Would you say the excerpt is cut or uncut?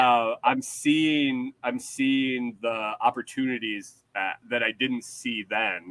uncut